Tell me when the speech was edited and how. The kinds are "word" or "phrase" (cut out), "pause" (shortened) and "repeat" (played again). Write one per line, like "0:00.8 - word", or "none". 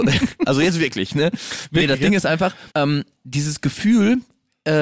0:02.7 - pause